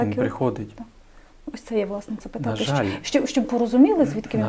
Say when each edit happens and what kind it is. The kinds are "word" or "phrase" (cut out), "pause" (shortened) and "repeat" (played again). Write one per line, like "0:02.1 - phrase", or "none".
0:02.2 - word
0:03.4 - word